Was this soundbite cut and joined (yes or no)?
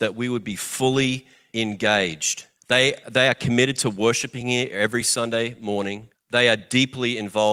no